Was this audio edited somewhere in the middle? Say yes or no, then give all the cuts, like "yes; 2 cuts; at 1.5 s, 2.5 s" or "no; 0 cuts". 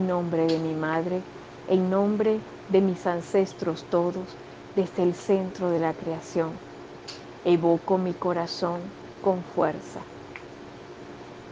no; 0 cuts